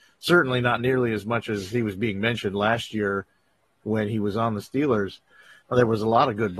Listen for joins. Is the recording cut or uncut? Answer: uncut